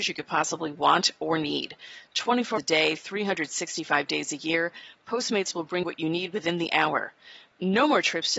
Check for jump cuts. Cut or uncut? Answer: cut